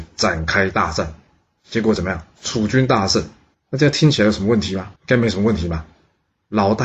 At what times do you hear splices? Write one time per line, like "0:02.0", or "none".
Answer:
0:03.5
0:05.0